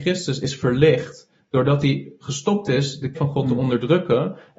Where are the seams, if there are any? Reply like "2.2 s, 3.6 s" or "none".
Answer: 3.1 s